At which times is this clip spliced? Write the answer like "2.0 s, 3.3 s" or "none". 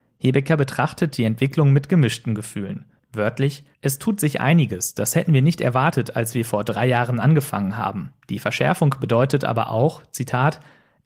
3.7 s, 8.2 s